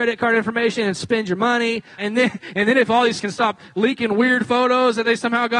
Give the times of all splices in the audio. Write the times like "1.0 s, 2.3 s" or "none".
2.0 s, 3.2 s